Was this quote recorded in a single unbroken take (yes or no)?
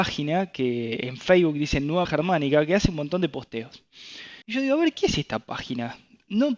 no